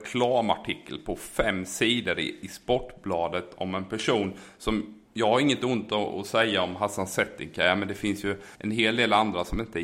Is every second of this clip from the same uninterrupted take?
no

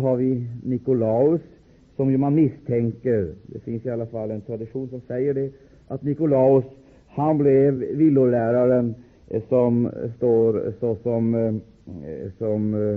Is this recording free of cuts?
yes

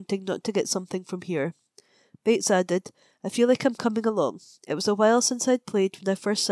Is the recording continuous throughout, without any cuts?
yes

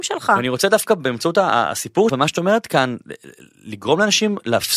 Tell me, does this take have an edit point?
yes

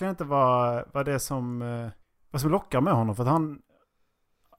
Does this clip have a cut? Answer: yes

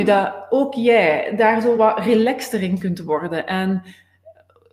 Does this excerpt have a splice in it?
no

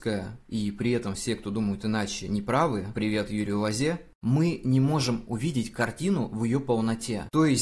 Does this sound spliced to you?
no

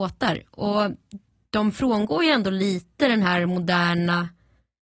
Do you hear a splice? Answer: no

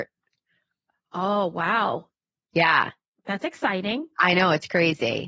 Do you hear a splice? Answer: no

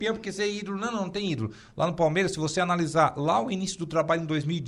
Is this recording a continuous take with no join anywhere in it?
yes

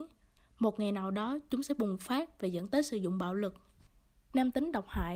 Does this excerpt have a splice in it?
no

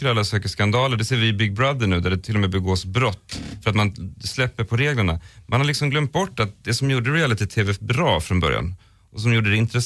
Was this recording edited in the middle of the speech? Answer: no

